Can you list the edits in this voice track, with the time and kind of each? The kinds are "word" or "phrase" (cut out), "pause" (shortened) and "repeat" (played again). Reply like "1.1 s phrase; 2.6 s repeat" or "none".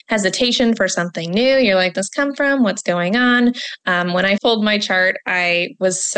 1.9 s word; 4.4 s word